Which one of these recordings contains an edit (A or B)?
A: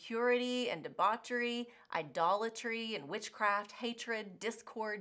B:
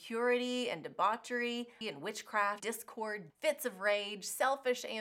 B